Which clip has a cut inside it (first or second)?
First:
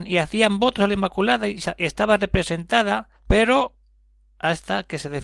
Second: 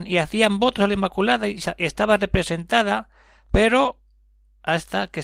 first